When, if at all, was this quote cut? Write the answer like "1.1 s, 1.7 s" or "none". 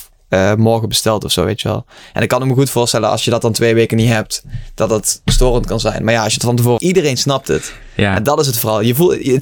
6.8 s